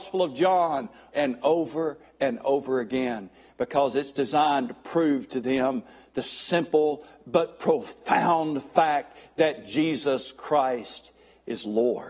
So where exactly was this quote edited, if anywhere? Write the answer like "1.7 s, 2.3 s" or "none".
1.1 s